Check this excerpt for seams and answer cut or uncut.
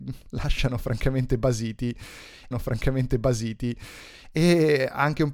cut